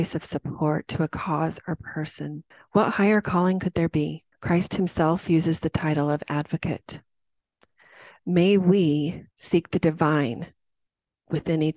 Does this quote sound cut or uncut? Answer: cut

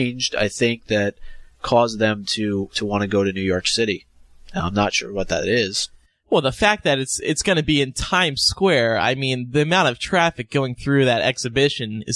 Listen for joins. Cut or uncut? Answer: uncut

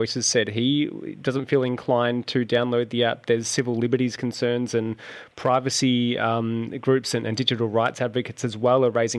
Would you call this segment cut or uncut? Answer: uncut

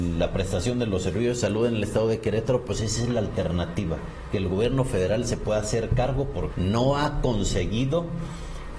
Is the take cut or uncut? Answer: cut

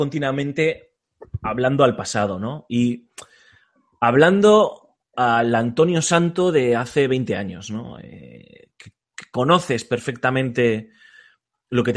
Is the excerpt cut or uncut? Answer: uncut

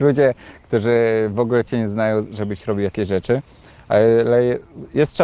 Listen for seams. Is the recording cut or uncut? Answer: uncut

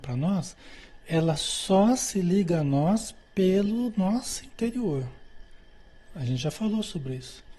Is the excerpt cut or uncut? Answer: uncut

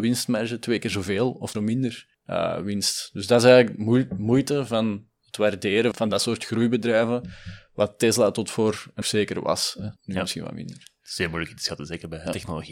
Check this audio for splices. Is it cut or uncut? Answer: cut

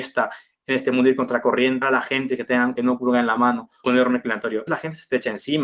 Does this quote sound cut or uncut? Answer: cut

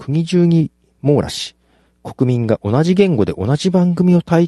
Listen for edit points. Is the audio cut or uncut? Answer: uncut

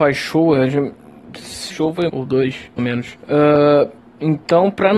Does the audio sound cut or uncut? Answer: cut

